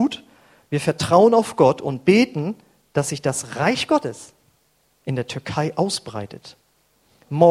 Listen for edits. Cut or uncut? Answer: uncut